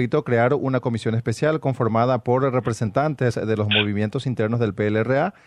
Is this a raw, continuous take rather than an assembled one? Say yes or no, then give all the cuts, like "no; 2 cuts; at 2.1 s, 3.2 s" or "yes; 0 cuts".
yes; 0 cuts